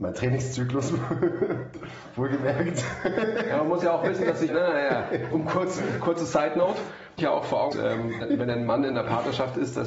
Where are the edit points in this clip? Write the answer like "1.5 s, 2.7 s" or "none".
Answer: 4.5 s, 5.3 s, 7.2 s, 7.7 s, 8.2 s

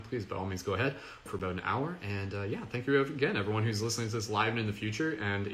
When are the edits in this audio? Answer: 1.3 s

